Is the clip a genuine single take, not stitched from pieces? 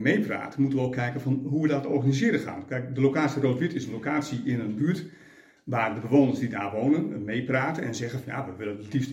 yes; 0 cuts

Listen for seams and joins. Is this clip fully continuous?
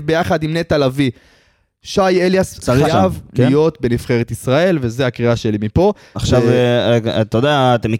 no; 1 cut; at 2.8 s

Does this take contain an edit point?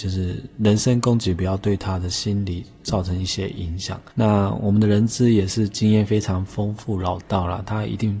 yes; 1 cut; at 4.1 s

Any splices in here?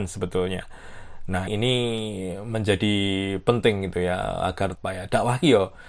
yes; 2 cuts; at 1.5 s, 4.8 s

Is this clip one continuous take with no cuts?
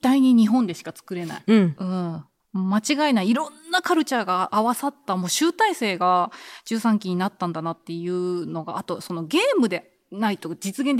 yes; 0 cuts

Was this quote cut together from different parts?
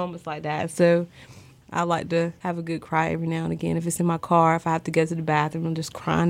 no; 0 cuts

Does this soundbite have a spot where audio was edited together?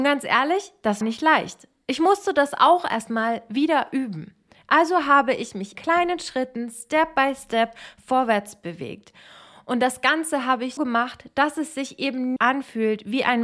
yes; 4 cuts; at 1.0 s, 5.7 s, 10.8 s, 12.4 s

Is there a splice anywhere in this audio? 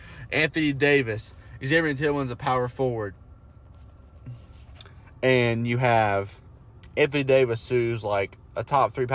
no; 0 cuts

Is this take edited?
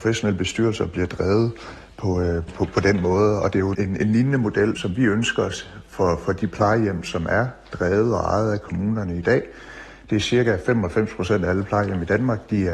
yes; 3 cuts; at 2.5 s, 3.7 s, 4.7 s

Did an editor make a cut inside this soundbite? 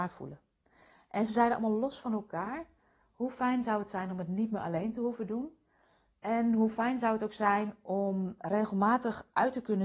no; 0 cuts

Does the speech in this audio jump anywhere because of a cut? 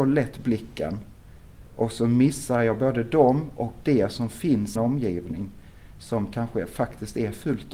yes; 1 cut; at 4.8 s

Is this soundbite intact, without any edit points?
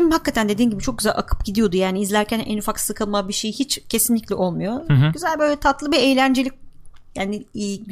yes; 0 cuts

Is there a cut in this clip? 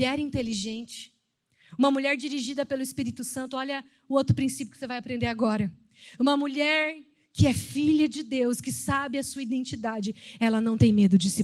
no; 0 cuts

